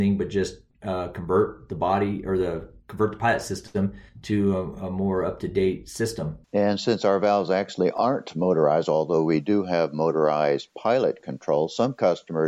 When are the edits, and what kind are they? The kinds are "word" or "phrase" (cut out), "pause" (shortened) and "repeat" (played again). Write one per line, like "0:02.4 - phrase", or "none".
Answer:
0:02.8 - pause
0:04.1 - pause
0:06.4 - pause